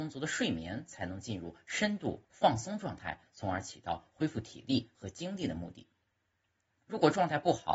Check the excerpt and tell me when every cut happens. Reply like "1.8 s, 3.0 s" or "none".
2.2 s

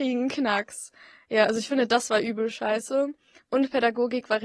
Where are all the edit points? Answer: none

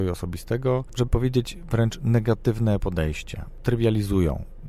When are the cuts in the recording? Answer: 1.1 s

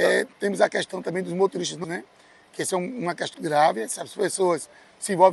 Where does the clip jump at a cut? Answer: 1.8 s, 3.3 s

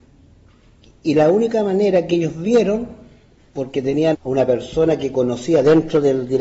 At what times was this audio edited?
4.1 s

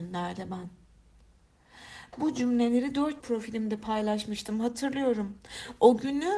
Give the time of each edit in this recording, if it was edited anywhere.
3.2 s

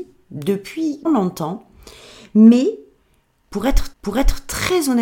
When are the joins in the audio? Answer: 1.1 s, 3.9 s

